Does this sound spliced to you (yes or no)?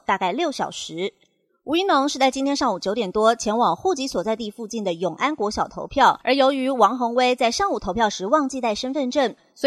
yes